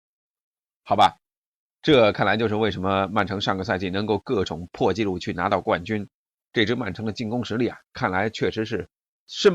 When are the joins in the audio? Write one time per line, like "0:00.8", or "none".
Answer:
none